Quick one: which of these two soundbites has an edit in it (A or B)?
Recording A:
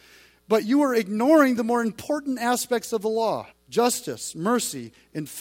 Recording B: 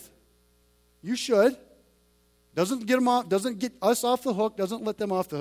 A